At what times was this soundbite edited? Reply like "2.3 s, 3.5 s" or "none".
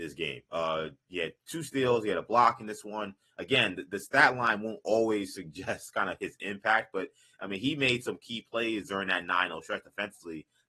none